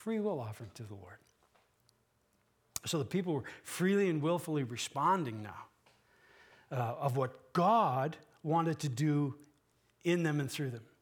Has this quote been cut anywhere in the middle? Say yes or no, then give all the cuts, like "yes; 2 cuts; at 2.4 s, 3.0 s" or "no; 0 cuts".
no; 0 cuts